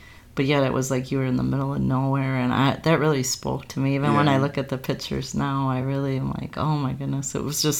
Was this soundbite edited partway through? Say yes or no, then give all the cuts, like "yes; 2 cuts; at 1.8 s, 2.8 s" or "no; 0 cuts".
no; 0 cuts